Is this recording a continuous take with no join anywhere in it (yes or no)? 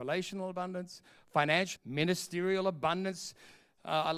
no